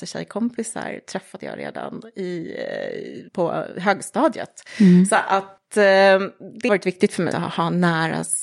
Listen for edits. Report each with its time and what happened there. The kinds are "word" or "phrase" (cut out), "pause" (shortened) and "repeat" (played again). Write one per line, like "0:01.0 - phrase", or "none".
0:03.3 - pause
0:06.7 - word
0:07.3 - word